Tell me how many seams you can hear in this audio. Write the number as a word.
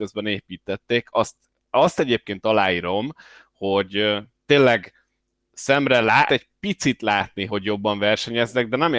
two